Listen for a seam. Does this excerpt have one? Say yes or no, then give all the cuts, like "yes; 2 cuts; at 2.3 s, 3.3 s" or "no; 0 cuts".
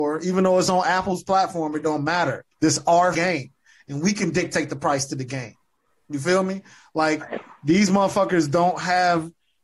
yes; 2 cuts; at 2.5 s, 3.1 s